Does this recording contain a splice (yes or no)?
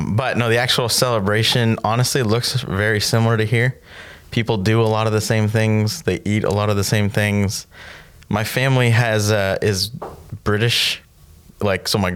no